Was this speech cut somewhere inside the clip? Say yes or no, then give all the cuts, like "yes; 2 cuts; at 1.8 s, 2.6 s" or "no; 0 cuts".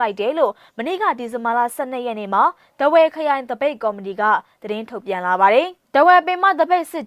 no; 0 cuts